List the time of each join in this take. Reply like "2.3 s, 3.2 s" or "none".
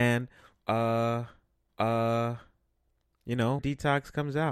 1.7 s, 3.6 s